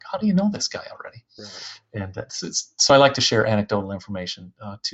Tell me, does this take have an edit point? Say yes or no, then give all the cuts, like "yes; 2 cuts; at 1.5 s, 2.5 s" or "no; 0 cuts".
no; 0 cuts